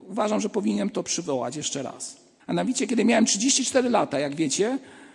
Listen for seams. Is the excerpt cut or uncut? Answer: cut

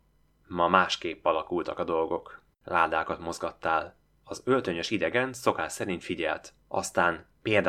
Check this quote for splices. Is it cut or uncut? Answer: cut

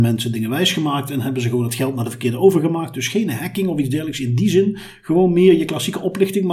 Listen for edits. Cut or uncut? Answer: uncut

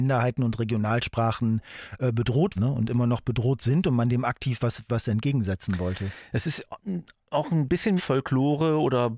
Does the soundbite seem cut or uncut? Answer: cut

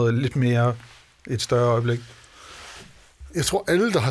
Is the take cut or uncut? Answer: uncut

